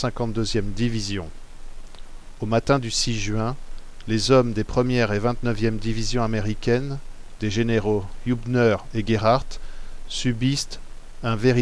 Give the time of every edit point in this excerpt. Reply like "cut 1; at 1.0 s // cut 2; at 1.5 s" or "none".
none